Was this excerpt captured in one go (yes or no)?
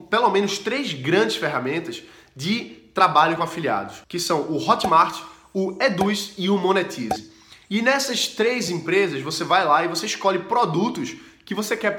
yes